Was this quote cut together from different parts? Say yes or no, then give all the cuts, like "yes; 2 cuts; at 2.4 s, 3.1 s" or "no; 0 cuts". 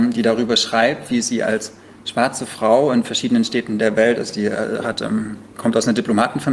no; 0 cuts